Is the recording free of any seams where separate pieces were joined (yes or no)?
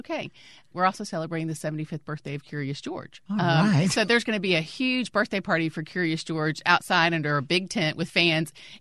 yes